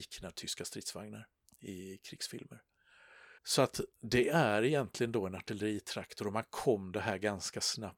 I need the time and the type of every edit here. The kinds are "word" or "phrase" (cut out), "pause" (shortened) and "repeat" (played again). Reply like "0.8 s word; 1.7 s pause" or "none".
3.4 s pause; 3.9 s pause